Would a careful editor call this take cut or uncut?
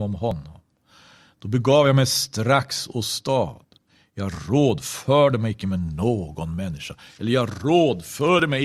uncut